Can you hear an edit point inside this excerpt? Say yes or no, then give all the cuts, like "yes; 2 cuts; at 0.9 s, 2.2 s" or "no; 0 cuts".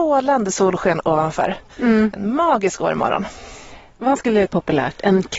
yes; 2 cuts; at 4.1 s, 4.5 s